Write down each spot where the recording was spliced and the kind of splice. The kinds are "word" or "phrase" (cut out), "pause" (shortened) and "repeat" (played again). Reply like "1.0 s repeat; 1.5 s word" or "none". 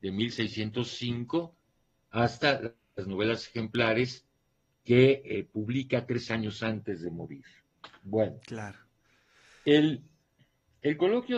none